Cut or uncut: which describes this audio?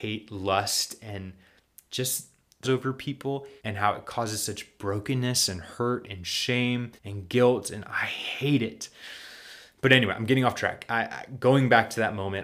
cut